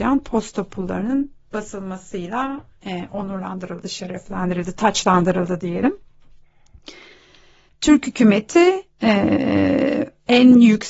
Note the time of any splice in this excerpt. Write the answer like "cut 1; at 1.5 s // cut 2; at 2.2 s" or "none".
none